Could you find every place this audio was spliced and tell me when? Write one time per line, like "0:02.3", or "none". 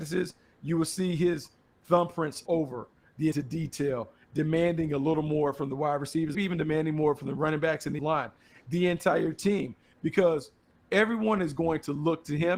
0:02.5
0:03.3
0:06.3
0:08.0